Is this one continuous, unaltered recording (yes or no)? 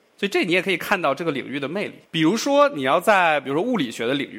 no